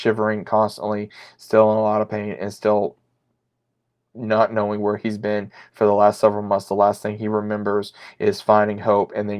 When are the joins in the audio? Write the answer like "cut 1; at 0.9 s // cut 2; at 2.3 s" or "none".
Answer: none